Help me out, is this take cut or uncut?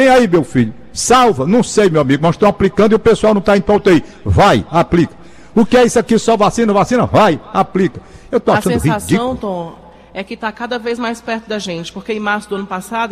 uncut